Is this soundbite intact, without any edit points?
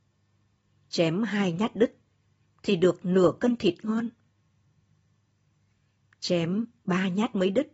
yes; 0 cuts

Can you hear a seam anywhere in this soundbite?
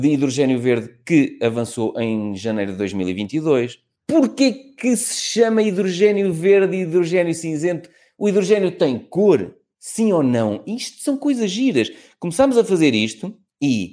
no; 0 cuts

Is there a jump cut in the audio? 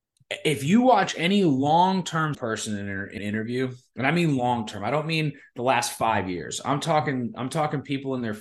yes; 2 cuts; at 2.3 s, 3.2 s

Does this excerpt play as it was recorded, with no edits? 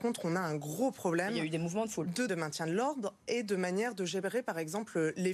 no; 1 cut; at 2.3 s

